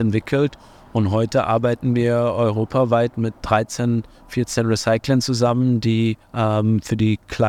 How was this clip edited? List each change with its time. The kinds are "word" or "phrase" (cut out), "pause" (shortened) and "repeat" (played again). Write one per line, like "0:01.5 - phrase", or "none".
0:06.2 - pause